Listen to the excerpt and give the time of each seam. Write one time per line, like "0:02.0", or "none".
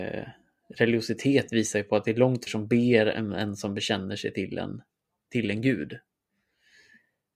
0:02.5